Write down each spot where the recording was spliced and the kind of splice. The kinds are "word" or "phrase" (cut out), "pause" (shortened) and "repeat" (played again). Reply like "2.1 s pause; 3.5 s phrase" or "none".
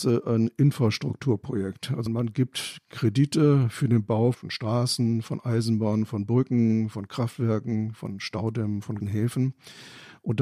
2.1 s word; 4.3 s word; 9.0 s word